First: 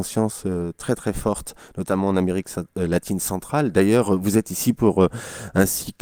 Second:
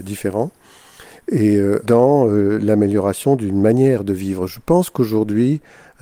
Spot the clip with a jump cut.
second; 1 cut; at 1.8 s

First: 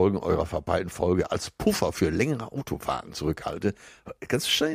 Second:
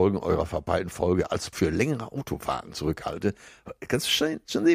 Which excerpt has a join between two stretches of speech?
second; 1 cut; at 1.5 s

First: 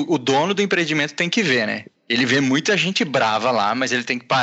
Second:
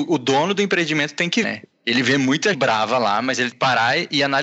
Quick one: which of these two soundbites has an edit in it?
second; 3 cuts; at 1.4 s, 2.5 s, 3.5 s

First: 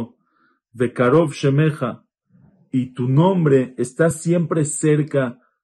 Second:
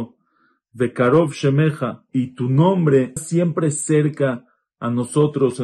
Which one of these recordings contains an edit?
second; 2 cuts; at 2.1 s, 3.2 s

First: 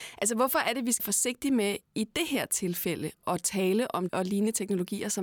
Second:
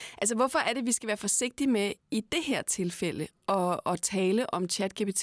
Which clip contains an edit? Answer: first; 3 cuts; at 1.0 s, 3.2 s, 4.1 s

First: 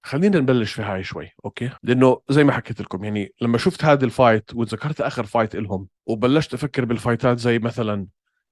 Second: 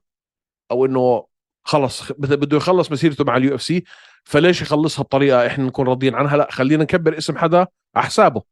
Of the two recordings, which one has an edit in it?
first; 2 cuts; at 1.8 s, 6.0 s

